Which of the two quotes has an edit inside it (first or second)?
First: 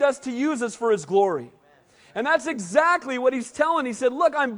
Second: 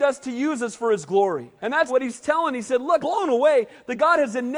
second